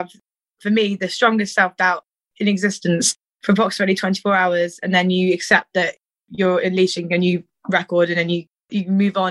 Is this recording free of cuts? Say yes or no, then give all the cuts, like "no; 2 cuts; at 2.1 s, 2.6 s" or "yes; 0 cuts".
yes; 0 cuts